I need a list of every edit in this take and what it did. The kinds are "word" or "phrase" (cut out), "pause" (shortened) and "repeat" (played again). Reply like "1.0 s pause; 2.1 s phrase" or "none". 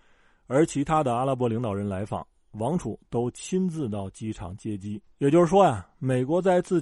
5.1 s pause